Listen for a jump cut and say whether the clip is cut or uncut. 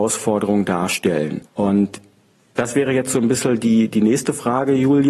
uncut